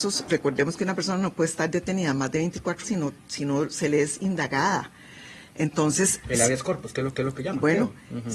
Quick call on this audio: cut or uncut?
cut